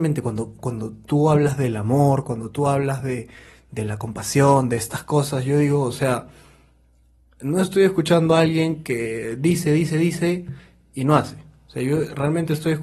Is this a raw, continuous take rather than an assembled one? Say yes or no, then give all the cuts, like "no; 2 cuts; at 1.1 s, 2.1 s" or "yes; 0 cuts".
yes; 0 cuts